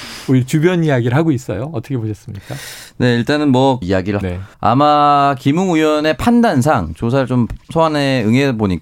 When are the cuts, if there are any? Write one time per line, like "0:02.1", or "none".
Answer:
0:03.8
0:04.2
0:04.5